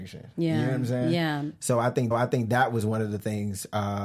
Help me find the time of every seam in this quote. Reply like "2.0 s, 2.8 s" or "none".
2.1 s

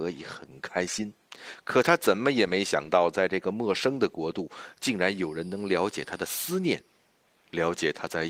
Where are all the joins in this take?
1.2 s

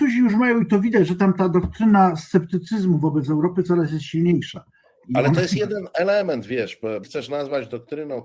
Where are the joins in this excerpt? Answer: 7.0 s

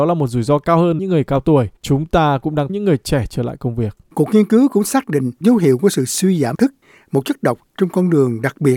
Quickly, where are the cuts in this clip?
1.0 s, 1.8 s, 2.7 s, 5.4 s, 6.5 s

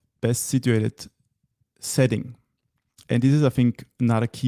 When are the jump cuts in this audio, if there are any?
none

